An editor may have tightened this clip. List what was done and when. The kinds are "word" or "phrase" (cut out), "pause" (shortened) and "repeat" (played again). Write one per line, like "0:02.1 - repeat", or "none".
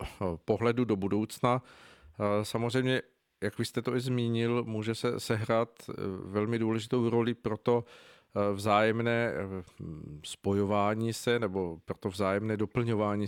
none